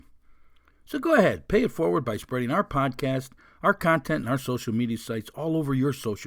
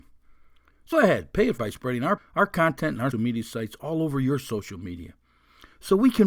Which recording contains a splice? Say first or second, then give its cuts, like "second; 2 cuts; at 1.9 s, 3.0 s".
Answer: second; 4 cuts; at 0.9 s, 1.6 s, 2.2 s, 3.1 s